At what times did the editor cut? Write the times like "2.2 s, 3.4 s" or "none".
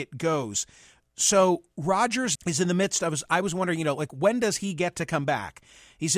2.4 s